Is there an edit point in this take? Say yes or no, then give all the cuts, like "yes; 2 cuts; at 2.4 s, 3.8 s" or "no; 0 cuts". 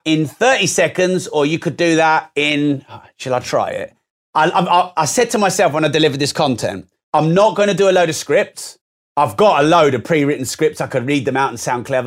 no; 0 cuts